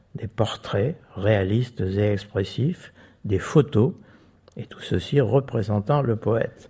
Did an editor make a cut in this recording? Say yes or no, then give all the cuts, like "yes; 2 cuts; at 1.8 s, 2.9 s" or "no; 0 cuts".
no; 0 cuts